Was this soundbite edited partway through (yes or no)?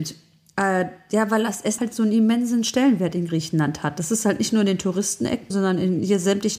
yes